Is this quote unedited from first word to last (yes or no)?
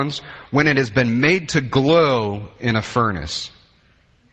yes